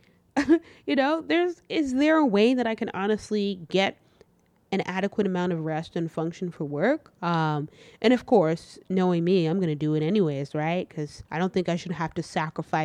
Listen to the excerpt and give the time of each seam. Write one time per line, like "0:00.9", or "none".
0:11.3